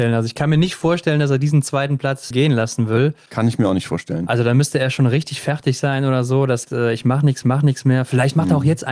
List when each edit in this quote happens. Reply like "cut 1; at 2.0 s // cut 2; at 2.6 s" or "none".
cut 1; at 2.3 s // cut 2; at 6.6 s // cut 3; at 7.4 s